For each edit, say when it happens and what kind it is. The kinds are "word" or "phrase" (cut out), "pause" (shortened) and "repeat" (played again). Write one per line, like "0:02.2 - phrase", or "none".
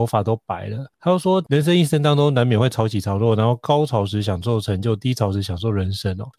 0:00.9 - pause